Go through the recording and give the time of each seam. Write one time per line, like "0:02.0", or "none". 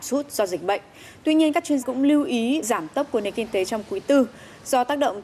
0:01.8
0:02.6